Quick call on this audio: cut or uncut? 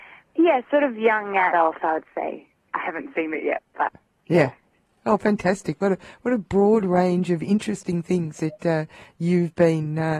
uncut